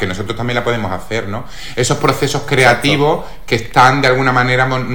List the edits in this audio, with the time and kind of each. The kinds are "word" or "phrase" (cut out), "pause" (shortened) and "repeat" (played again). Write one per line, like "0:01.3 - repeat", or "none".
none